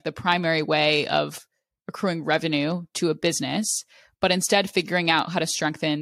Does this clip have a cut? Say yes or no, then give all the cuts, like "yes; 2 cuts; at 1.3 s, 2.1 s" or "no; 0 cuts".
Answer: no; 0 cuts